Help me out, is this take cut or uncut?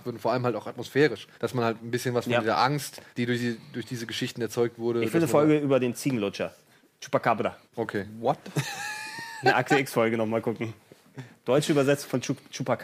cut